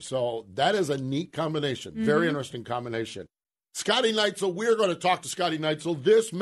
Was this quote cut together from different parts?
no; 0 cuts

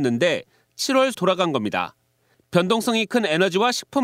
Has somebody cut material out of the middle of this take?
yes; 1 cut; at 1.1 s

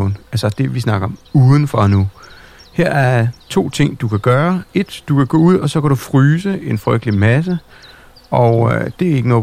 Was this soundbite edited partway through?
no; 0 cuts

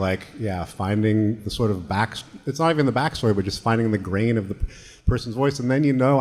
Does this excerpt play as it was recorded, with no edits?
yes; 0 cuts

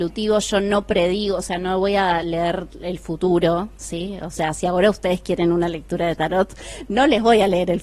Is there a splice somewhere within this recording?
no; 0 cuts

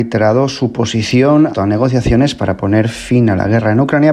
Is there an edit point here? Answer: yes; 1 cut; at 1.5 s

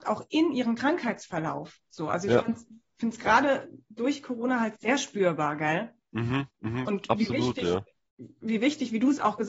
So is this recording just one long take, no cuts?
no; 1 cut; at 4.8 s

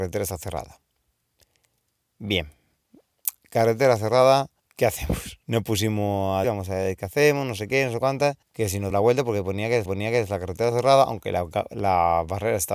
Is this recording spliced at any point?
yes; 7 cuts; at 4.6 s, 5.4 s, 6.4 s, 8.4 s, 8.9 s, 9.8 s, 10.7 s

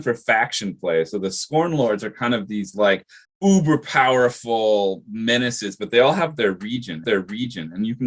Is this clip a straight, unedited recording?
no; 2 cuts; at 3.2 s, 7.0 s

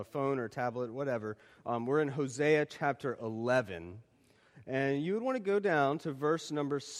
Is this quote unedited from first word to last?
yes; 0 cuts

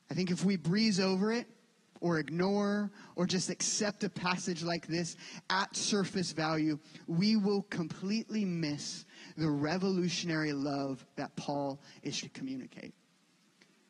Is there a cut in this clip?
yes; 1 cut; at 12.2 s

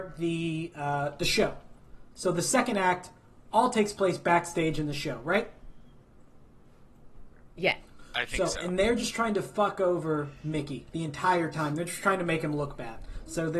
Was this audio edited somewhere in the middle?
no; 0 cuts

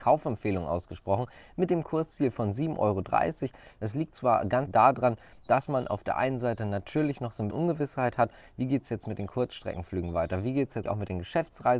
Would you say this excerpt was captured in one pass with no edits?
no; 3 cuts; at 4.7 s, 7.5 s, 10.8 s

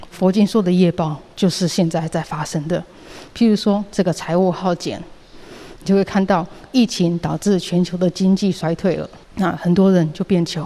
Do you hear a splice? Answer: yes; 1 cut; at 9.2 s

